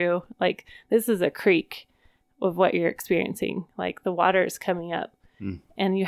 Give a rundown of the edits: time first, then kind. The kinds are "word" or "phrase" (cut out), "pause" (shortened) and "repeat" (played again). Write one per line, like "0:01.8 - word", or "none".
none